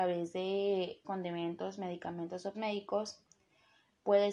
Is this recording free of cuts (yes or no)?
no